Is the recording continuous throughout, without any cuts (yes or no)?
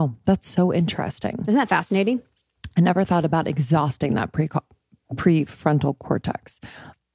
yes